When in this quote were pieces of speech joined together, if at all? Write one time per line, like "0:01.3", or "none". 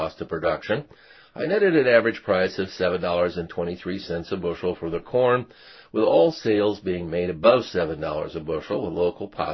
none